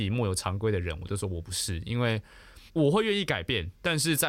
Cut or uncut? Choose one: cut